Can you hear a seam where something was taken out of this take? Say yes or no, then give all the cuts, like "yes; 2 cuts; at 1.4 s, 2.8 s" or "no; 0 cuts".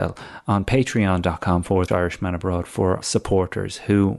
yes; 2 cuts; at 1.9 s, 3.0 s